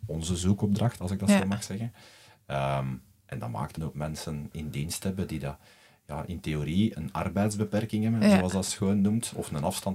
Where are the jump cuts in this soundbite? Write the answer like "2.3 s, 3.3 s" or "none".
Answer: 3.8 s, 4.5 s, 6.9 s, 8.7 s